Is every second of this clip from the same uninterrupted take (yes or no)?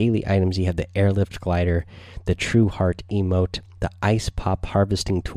yes